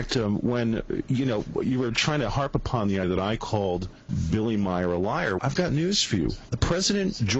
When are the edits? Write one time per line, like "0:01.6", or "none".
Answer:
0:03.0
0:05.4